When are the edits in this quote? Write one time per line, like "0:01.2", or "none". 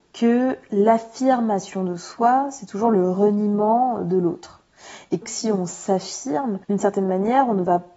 0:05.2
0:06.6